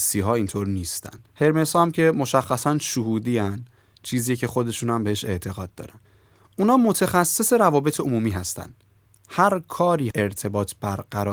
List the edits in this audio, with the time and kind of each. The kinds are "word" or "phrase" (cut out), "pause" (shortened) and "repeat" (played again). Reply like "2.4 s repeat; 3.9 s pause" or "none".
1.3 s pause; 10.1 s phrase